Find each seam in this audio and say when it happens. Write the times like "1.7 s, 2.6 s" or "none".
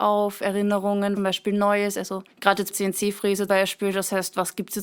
1.2 s, 2.3 s, 2.7 s, 3.5 s